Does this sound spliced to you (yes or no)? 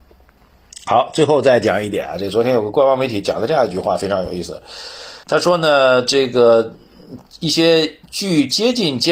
yes